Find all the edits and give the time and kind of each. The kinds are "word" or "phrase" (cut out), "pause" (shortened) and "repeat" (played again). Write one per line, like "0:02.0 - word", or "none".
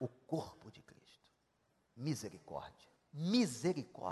0:03.0 - pause

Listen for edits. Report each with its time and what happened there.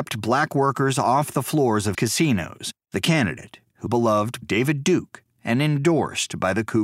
0:01.9 - word
0:02.8 - pause
0:03.9 - word
0:04.4 - word

